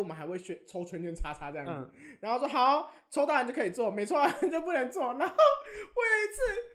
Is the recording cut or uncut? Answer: uncut